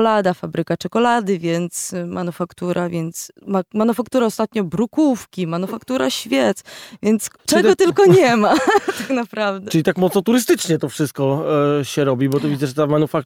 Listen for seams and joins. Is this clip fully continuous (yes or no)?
no